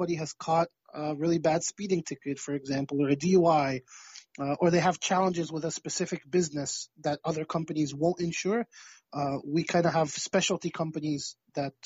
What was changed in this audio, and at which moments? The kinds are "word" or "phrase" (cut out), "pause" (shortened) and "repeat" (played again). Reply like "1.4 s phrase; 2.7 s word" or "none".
none